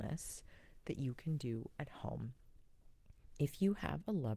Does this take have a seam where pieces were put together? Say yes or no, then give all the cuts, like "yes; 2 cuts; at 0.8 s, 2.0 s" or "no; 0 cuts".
no; 0 cuts